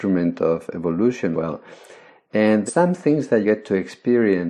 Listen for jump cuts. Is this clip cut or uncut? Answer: cut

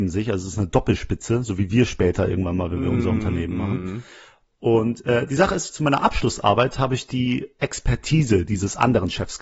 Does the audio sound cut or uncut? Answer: uncut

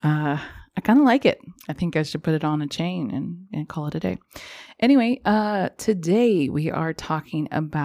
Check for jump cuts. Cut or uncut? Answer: uncut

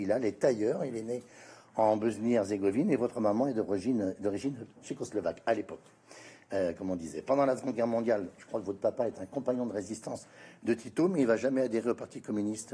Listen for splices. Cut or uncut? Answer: uncut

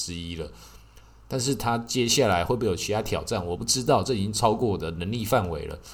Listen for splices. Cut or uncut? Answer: uncut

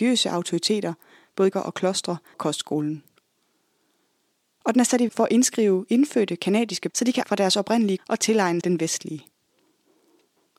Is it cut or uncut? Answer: cut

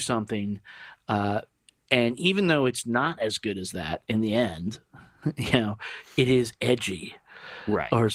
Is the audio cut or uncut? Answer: uncut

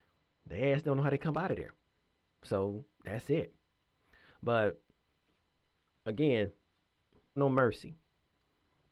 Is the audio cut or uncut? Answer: cut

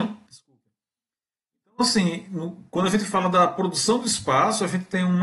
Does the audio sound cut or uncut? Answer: uncut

